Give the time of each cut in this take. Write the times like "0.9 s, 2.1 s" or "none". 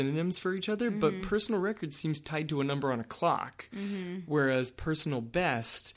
none